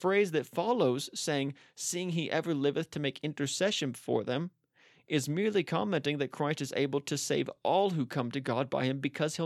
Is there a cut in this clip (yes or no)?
no